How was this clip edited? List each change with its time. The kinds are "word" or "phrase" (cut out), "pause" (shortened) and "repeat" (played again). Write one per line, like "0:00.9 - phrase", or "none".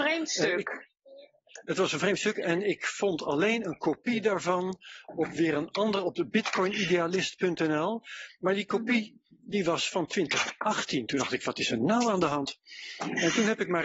none